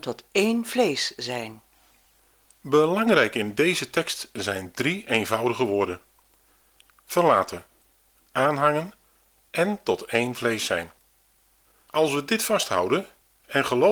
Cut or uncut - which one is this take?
uncut